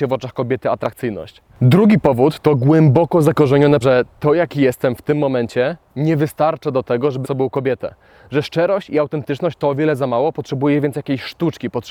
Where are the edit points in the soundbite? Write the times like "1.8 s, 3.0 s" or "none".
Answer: 3.8 s, 7.2 s